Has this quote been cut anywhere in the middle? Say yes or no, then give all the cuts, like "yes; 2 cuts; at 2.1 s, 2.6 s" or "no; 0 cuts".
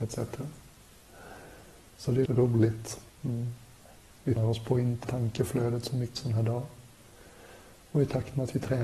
yes; 4 cuts; at 2.3 s, 4.4 s, 5.0 s, 6.2 s